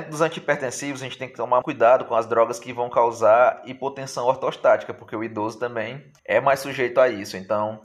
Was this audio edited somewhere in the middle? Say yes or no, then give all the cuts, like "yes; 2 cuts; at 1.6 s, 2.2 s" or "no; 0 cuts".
yes; 2 cuts; at 1.6 s, 6.2 s